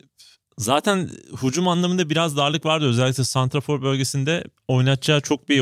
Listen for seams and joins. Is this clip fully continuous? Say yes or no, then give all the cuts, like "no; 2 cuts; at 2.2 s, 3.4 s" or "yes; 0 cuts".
no; 1 cut; at 4.6 s